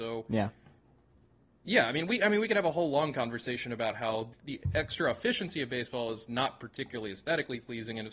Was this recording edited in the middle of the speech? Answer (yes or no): yes